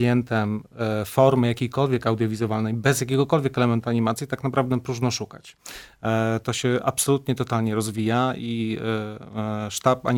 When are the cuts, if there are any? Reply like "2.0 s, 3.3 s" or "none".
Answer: none